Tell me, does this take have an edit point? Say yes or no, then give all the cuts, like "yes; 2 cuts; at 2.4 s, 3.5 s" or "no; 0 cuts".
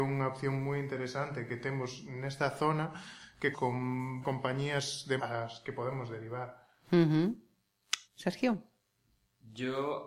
yes; 4 cuts; at 3.5 s, 4.2 s, 5.2 s, 8.0 s